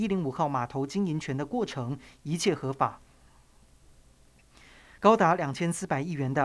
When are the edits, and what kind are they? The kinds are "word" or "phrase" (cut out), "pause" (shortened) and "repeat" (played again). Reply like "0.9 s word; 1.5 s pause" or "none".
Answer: none